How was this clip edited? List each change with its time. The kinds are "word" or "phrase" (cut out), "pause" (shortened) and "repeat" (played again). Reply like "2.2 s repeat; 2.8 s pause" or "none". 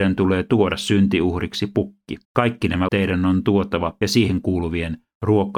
2.2 s pause; 2.9 s word; 4.0 s phrase